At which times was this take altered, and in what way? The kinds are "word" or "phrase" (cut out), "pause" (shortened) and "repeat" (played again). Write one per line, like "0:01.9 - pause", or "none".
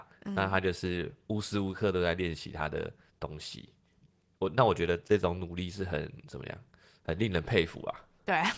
none